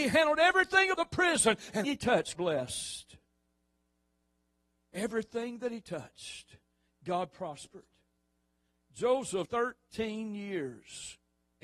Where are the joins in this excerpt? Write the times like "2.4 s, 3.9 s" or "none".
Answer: 0.9 s, 1.8 s, 2.3 s, 9.4 s